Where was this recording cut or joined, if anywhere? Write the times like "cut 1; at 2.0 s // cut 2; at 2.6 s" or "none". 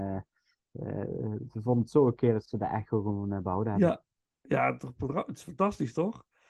cut 1; at 2.4 s // cut 2; at 4.2 s